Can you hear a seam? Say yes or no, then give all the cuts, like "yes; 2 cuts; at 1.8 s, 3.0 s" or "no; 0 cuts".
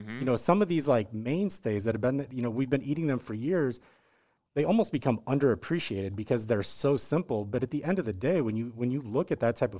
no; 0 cuts